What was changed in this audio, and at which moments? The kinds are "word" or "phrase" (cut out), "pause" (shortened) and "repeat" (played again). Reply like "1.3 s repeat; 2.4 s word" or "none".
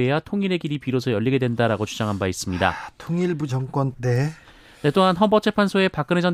3.5 s phrase; 3.9 s word

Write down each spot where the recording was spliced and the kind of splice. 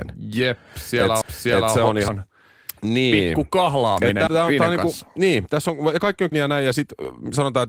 1.2 s repeat; 2.1 s word; 4.3 s phrase; 6.3 s word

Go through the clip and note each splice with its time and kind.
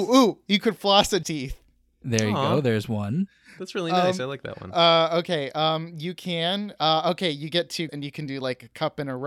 1.2 s word; 7.9 s word

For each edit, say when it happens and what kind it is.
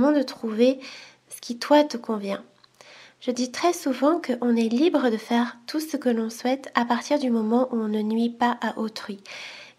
none

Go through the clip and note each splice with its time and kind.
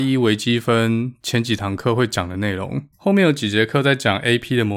2.9 s pause

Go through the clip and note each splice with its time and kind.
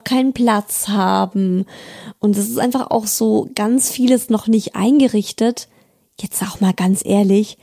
none

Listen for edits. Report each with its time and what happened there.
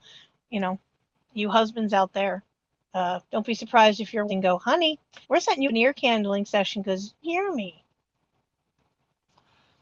1.1 s pause; 3.3 s pause; 4.3 s phrase; 5.2 s pause; 5.7 s word; 7.2 s phrase

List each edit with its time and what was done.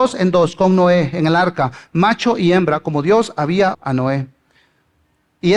3.7 s word

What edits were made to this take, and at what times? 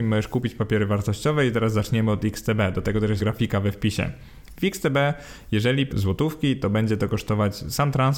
3.2 s word; 5.9 s word

